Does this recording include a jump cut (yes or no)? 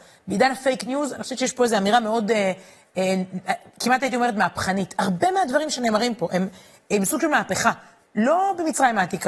no